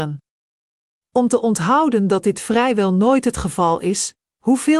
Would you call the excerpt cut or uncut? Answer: uncut